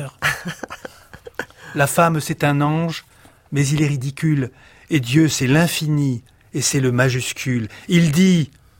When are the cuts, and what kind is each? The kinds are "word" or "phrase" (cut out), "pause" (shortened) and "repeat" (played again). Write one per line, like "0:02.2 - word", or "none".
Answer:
none

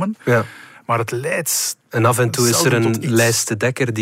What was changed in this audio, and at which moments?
none

